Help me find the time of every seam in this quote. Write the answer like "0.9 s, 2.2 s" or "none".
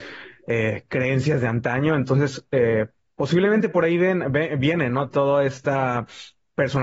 none